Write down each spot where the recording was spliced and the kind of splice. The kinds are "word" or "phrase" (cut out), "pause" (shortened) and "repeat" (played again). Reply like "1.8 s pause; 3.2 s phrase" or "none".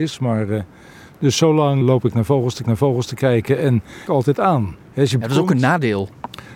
1.8 s word; 2.6 s repeat; 4.1 s phrase; 4.8 s pause; 5.2 s word